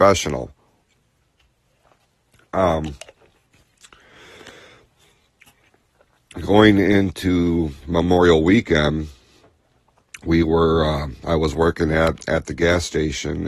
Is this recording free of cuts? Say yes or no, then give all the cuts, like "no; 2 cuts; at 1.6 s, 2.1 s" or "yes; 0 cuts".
no; 1 cut; at 7.8 s